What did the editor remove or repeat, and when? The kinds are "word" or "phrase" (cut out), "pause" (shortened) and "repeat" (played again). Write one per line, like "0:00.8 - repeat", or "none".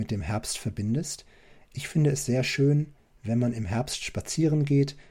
none